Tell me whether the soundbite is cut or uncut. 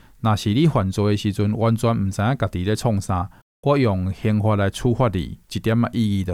cut